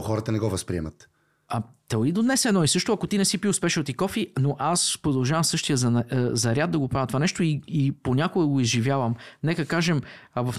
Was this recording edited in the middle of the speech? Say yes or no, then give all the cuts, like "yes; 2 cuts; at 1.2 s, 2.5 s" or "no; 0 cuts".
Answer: no; 0 cuts